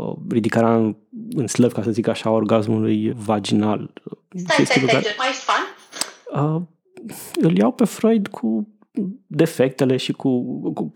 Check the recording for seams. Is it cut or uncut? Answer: cut